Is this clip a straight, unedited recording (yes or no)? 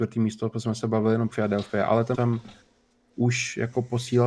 no